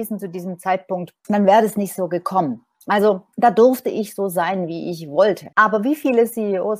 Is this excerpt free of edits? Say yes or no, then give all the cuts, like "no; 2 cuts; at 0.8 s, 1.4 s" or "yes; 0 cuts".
no; 3 cuts; at 1.2 s, 3.3 s, 5.5 s